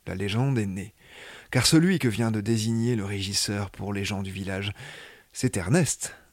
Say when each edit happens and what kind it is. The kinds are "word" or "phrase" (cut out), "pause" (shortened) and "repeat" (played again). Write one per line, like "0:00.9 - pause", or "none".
none